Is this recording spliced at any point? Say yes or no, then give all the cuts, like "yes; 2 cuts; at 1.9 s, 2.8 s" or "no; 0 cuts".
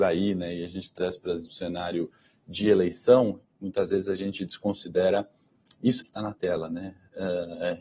yes; 3 cuts; at 1.0 s, 1.5 s, 6.0 s